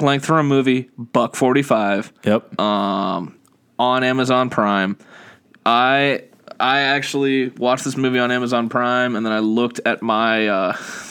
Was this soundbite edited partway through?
no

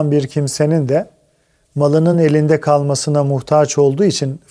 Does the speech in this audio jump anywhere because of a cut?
no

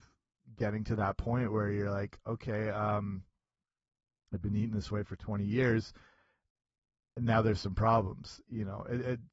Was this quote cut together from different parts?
no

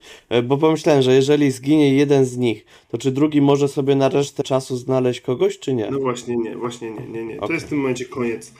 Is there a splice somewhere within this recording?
yes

